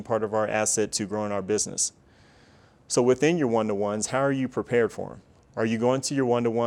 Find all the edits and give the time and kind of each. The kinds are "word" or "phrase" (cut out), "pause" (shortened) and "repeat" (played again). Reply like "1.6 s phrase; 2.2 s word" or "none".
none